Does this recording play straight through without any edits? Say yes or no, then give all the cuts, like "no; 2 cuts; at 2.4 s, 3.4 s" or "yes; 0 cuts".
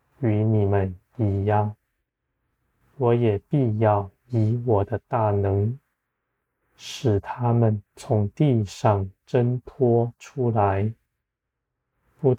no; 1 cut; at 7.9 s